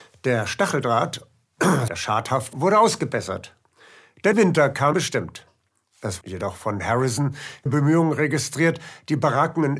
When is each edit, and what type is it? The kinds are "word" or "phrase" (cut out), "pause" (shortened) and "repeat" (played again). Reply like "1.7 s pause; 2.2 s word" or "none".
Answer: 1.9 s word; 2.5 s word; 4.3 s word; 4.9 s word; 6.2 s word; 7.7 s word